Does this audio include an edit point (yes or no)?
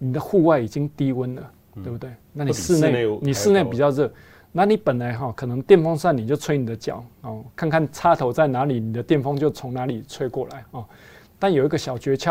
no